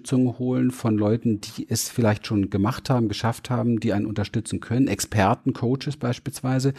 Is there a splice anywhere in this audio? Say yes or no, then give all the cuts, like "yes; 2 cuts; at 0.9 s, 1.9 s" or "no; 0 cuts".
no; 0 cuts